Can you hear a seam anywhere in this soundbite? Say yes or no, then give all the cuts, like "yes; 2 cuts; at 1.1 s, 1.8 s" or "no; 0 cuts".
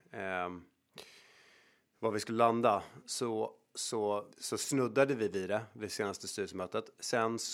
yes; 1 cut; at 4.3 s